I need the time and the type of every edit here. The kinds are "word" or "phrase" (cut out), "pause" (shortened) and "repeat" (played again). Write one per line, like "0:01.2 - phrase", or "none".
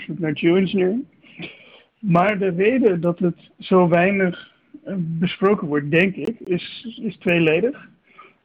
none